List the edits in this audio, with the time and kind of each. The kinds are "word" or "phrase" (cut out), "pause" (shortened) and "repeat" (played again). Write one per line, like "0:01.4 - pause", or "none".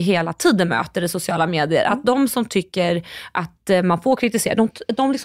none